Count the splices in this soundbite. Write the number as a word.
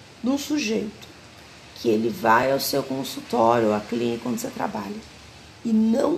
zero